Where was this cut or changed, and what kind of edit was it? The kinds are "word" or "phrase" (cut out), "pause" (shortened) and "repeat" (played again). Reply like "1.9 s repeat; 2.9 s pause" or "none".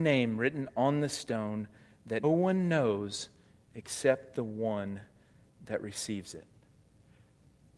2.2 s word